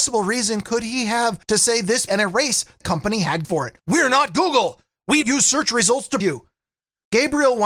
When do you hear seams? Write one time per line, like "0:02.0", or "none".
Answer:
0:01.4
0:02.1
0:02.8
0:03.4
0:03.8
0:05.2
0:06.2

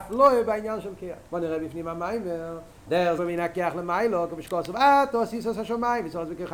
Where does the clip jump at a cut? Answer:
0:01.3
0:02.9
0:03.2

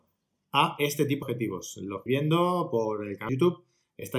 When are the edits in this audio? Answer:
0:01.2
0:02.1
0:03.3

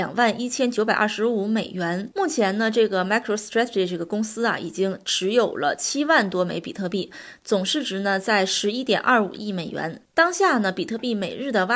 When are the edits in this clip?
none

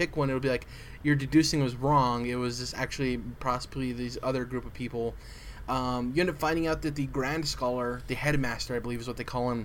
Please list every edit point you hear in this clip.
none

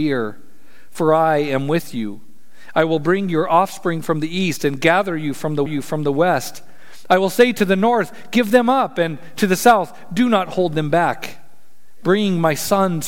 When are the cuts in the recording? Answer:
0:05.7

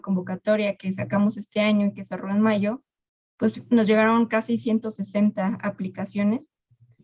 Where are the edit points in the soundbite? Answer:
none

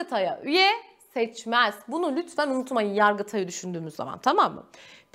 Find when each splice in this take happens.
none

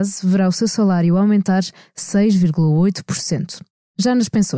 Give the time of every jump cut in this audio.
none

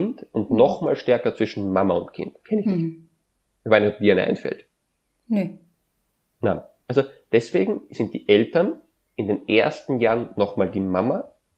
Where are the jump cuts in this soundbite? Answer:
none

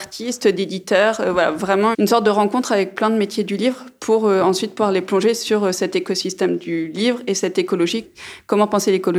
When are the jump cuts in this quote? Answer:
0:01.9

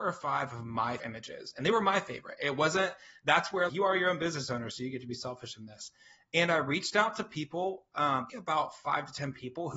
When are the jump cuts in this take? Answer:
0:01.0
0:03.7
0:08.3

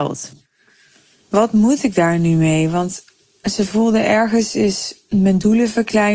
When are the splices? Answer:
none

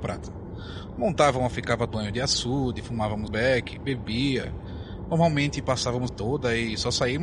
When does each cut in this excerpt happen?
0:01.5
0:01.9
0:03.3
0:06.1

